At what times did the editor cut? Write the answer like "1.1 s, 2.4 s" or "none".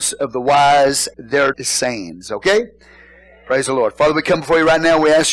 1.1 s, 1.5 s